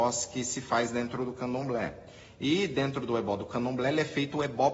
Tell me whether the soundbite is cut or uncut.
uncut